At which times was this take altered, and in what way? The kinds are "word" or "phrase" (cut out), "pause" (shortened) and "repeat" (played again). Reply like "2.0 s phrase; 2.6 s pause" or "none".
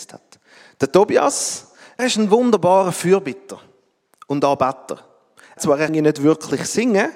2.0 s word; 5.6 s word; 5.9 s word